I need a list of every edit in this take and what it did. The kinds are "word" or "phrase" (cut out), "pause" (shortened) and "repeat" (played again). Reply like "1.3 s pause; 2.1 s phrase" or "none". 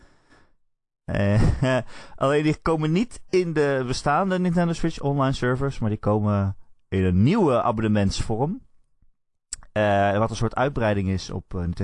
none